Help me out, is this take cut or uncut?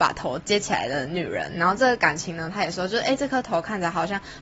uncut